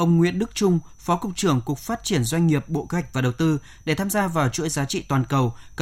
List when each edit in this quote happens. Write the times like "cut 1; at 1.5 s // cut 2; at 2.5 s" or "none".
none

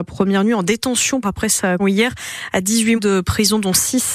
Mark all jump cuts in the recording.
cut 1; at 1.2 s // cut 2; at 1.8 s // cut 3; at 3.0 s

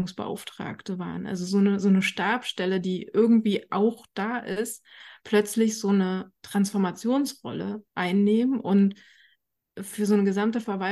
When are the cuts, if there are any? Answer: none

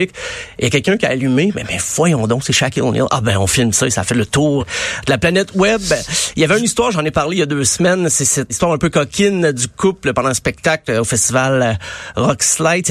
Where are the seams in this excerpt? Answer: cut 1; at 4.6 s // cut 2; at 8.5 s

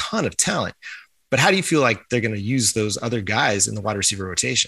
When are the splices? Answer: none

